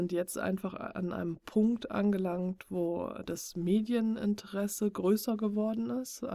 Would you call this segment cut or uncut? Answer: cut